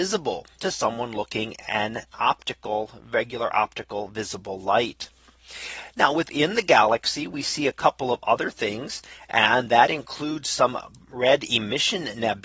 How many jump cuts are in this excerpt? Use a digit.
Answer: 0